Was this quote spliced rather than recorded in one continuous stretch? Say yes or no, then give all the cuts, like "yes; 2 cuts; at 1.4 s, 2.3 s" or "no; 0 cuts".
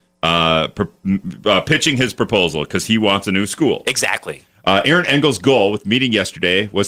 no; 0 cuts